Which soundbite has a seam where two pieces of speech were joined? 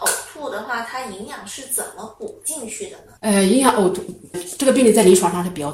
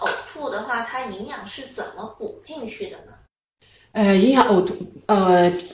first; 2 cuts; at 3.2 s, 4.3 s

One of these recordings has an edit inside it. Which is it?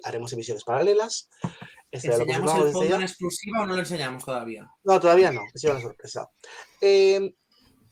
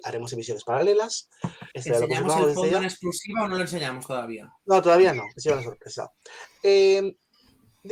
second; 1 cut; at 1.7 s

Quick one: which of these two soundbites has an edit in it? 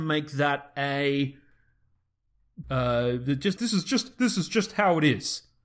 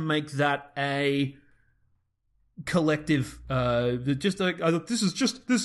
first; 2 cuts; at 2.6 s, 3.6 s

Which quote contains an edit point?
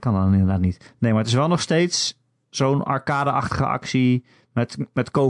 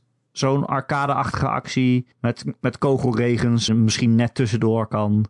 second; 2 cuts; at 2.1 s, 3.7 s

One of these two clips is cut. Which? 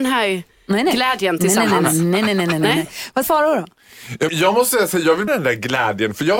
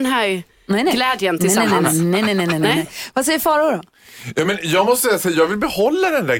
first; 3 cuts; at 3.2 s, 4.3 s, 5.3 s

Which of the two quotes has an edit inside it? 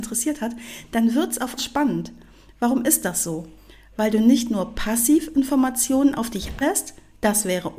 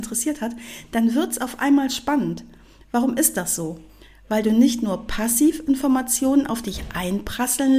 first; 2 cuts; at 1.6 s, 6.6 s

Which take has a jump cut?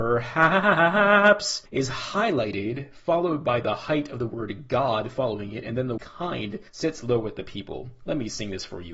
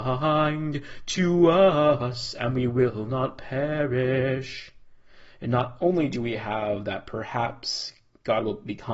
first; 3 cuts; at 1.7 s, 6.0 s, 6.7 s

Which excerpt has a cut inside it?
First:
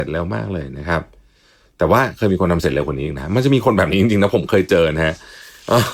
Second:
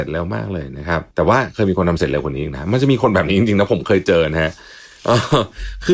second; 1 cut; at 1.1 s

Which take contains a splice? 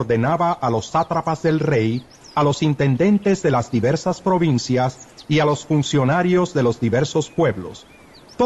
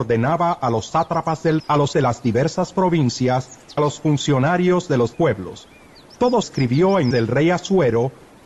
second; 6 cuts; at 1.6 s, 1.9 s, 3.8 s, 5.1 s, 6.4 s, 7.1 s

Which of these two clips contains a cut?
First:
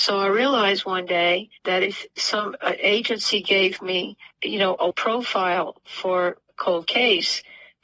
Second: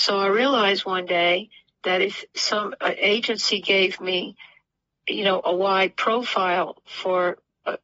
first; 4 cuts; at 1.6 s, 4.3 s, 4.9 s, 6.5 s

